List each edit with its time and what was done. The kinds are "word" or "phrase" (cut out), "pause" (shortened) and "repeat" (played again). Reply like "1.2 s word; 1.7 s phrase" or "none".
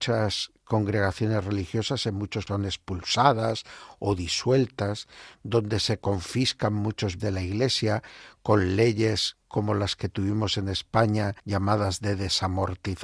2.5 s word; 7.2 s word; 9.4 s pause; 11.4 s pause